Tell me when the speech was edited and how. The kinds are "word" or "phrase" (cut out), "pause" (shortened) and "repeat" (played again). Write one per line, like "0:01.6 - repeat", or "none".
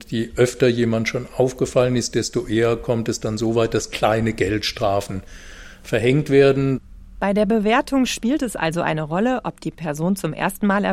none